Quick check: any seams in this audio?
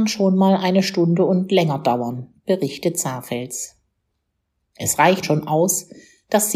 yes; 1 cut; at 5.2 s

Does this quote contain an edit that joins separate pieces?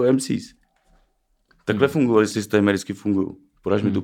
yes; 1 cut; at 2.3 s

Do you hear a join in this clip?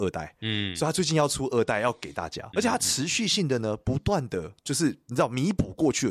yes; 1 cut; at 2.5 s

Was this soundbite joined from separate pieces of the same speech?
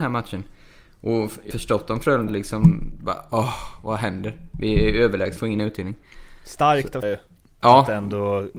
yes; 4 cuts; at 1.5 s, 2.3 s, 5.4 s, 7.0 s

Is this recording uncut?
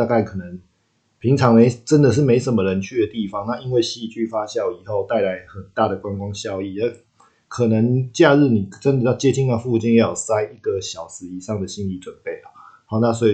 yes; 0 cuts

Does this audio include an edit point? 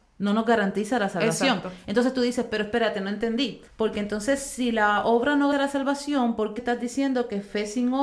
yes; 3 cuts; at 3.7 s, 5.5 s, 6.6 s

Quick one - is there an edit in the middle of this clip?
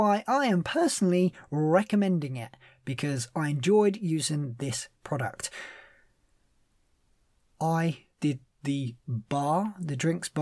yes; 1 cut; at 8.1 s

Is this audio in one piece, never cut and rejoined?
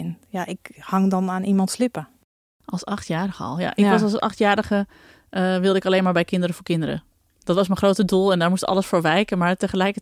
yes; 0 cuts

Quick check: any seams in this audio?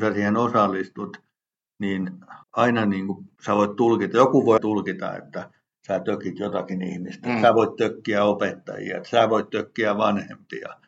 yes; 3 cuts; at 2.4 s, 3.3 s, 4.6 s

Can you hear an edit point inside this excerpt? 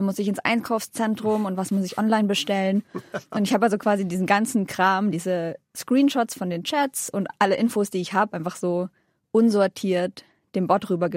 no; 0 cuts

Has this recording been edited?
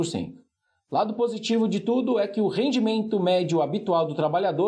no; 0 cuts

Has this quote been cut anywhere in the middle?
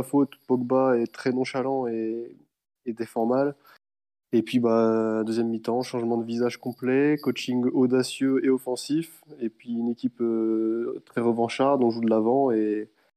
no; 0 cuts

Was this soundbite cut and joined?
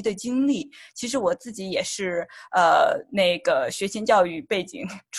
no; 0 cuts

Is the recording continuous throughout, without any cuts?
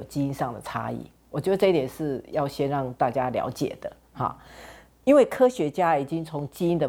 yes; 0 cuts

